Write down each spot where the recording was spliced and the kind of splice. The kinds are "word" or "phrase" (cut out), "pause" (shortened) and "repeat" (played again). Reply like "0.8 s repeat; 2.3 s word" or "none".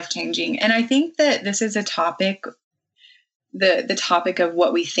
none